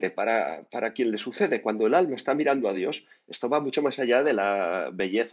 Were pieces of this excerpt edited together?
no; 0 cuts

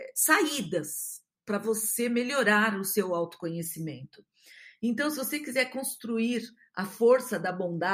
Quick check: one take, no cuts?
yes; 0 cuts

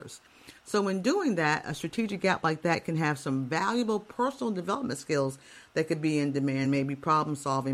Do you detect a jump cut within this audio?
no; 0 cuts

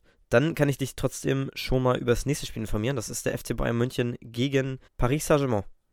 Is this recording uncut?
no; 1 cut; at 4.9 s

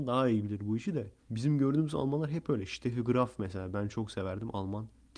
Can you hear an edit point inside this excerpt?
yes; 1 cut; at 1.2 s

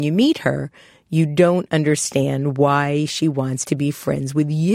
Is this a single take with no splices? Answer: yes; 0 cuts

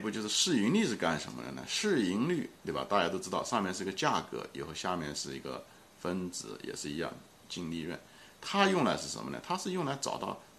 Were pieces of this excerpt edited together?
no; 0 cuts

